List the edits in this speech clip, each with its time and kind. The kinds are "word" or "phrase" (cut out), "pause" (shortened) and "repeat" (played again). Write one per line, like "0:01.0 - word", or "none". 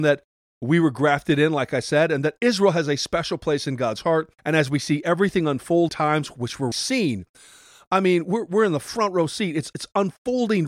0:04.4 - pause
0:05.9 - phrase
0:06.7 - word
0:09.7 - word